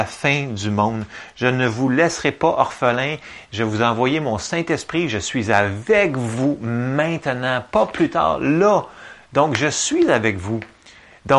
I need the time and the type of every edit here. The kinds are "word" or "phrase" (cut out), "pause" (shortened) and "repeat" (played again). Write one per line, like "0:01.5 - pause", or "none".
none